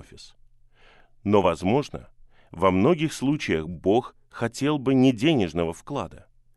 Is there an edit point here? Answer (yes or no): no